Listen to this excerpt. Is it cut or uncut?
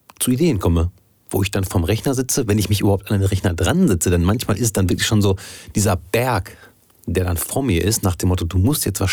uncut